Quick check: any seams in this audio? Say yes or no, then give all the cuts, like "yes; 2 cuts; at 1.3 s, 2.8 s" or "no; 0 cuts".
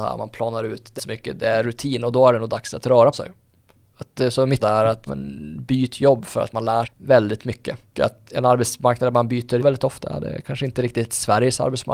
yes; 8 cuts; at 1.0 s, 3.1 s, 4.6 s, 5.1 s, 6.8 s, 7.9 s, 8.3 s, 9.6 s